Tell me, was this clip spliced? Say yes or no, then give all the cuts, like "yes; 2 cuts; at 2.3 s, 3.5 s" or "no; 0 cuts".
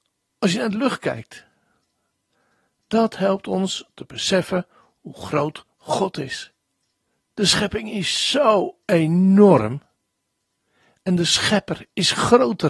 no; 0 cuts